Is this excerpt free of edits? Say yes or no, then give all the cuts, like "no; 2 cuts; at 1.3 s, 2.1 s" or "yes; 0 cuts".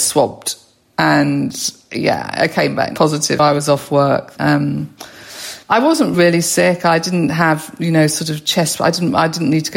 no; 3 cuts; at 3.4 s, 4.4 s, 6.1 s